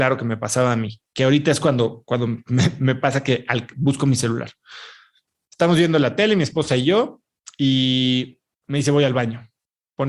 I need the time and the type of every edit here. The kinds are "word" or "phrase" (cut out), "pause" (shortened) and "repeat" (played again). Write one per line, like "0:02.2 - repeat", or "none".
none